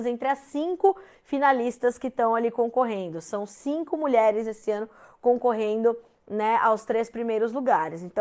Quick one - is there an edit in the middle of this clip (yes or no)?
no